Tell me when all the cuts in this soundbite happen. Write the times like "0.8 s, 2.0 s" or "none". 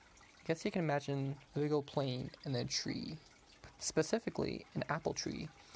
1.5 s